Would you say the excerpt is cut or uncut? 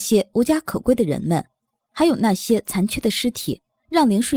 uncut